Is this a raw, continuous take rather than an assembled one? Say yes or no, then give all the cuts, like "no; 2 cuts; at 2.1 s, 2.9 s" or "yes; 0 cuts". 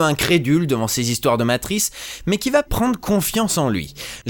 no; 1 cut; at 2.7 s